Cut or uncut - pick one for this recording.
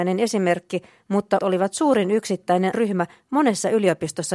cut